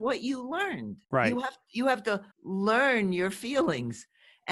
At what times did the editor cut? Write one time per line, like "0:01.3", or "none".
0:01.0
0:02.3